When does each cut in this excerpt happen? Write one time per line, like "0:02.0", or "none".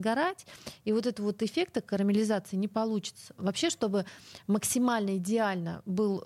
none